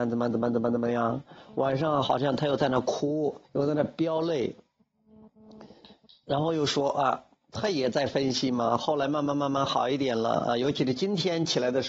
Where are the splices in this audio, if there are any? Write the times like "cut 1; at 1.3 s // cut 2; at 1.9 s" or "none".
cut 1; at 3.4 s